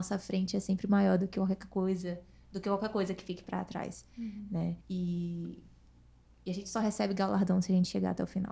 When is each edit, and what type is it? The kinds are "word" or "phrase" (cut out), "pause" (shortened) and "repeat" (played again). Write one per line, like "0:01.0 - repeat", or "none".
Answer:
0:04.8 - pause